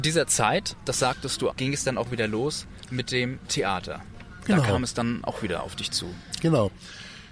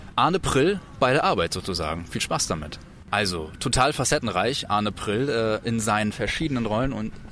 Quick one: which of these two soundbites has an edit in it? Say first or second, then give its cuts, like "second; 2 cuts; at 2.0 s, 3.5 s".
first; 1 cut; at 1.5 s